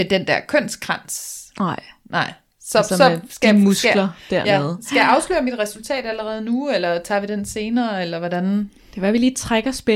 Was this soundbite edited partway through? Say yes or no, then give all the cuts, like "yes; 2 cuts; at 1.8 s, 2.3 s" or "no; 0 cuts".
no; 0 cuts